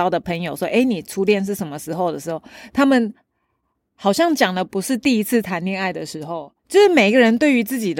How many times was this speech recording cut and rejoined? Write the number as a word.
one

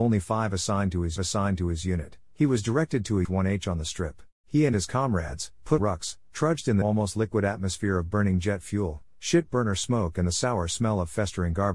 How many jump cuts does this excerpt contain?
five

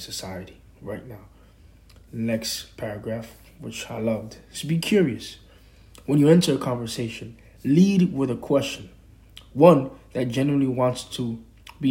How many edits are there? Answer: zero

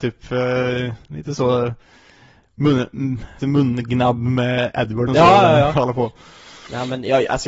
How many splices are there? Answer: two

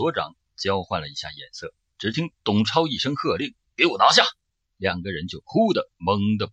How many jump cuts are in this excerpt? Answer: one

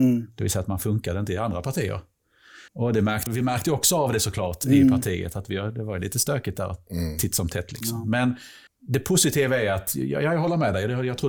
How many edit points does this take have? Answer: three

